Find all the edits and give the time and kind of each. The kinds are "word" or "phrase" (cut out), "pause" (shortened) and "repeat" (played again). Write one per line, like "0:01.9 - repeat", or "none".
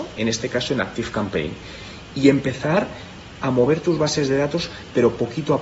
none